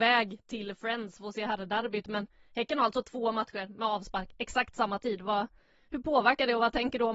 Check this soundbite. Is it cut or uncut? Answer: uncut